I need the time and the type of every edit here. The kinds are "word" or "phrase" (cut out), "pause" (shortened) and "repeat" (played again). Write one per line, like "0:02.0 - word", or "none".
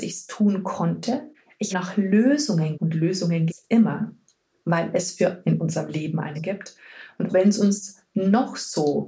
0:01.7 - word
0:02.7 - word
0:03.5 - word
0:05.4 - word
0:06.3 - word
0:07.3 - word